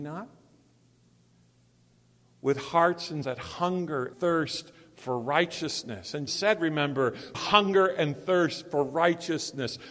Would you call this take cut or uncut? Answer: cut